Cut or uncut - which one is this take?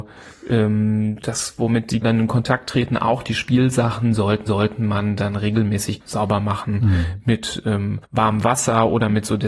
cut